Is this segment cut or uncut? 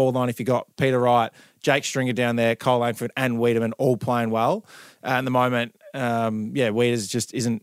uncut